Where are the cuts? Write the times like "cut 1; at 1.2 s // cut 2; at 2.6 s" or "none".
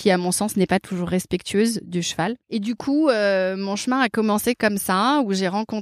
cut 1; at 2.4 s